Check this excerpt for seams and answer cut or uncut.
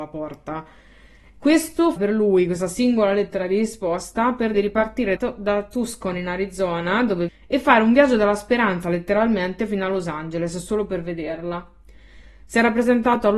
cut